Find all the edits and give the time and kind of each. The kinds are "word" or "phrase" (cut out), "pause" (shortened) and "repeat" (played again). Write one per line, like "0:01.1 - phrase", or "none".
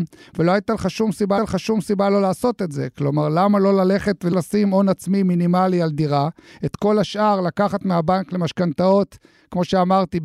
0:01.4 - repeat